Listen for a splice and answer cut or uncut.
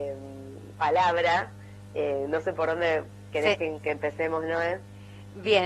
uncut